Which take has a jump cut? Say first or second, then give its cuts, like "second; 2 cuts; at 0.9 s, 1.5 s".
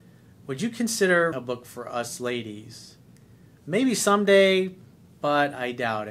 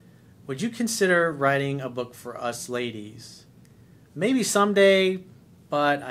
first; 1 cut; at 1.3 s